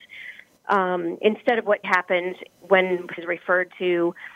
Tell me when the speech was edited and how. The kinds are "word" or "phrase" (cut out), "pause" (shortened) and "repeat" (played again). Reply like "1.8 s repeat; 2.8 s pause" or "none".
1.8 s word; 3.2 s word